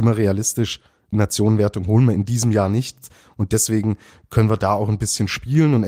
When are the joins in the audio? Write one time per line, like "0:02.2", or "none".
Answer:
0:01.1